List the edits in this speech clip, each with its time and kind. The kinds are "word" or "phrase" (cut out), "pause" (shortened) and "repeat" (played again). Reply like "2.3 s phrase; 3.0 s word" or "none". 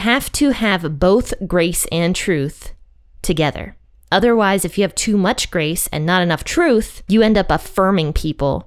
none